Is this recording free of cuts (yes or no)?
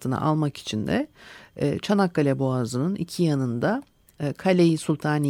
yes